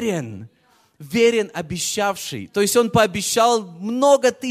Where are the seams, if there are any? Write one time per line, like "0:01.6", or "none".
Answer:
none